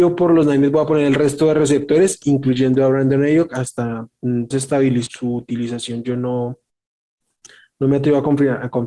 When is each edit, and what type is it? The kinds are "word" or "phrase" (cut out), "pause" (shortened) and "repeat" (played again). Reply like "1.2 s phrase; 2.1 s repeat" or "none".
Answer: 4.5 s phrase; 5.1 s word